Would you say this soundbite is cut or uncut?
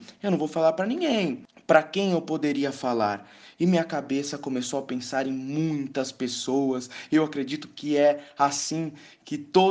uncut